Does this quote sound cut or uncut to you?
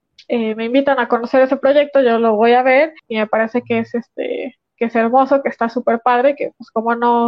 cut